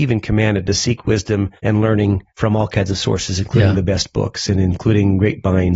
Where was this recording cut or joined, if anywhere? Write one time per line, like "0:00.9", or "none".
0:01.6
0:02.3

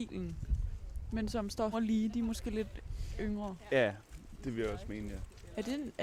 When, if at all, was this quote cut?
0:01.7

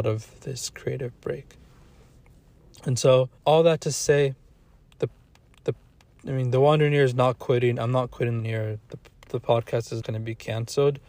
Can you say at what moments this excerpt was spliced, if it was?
0:03.4
0:05.5
0:08.4
0:10.0

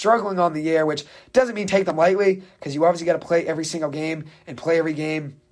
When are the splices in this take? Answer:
none

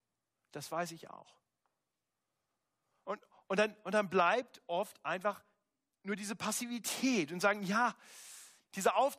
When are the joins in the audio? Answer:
none

